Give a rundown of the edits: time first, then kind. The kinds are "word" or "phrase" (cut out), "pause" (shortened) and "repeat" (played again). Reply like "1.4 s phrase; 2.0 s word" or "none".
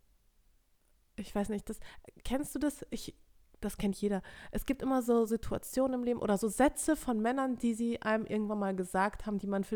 2.2 s pause; 5.3 s word